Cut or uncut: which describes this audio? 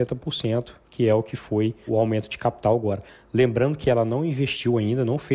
cut